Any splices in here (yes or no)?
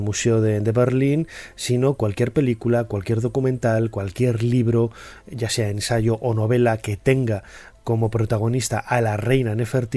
no